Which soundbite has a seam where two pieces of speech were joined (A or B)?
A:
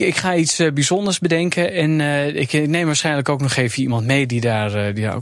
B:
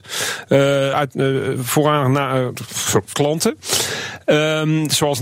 B